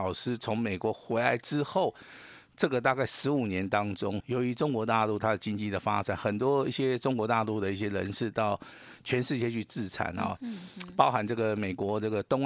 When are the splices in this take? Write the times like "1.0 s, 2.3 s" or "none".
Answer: 4.2 s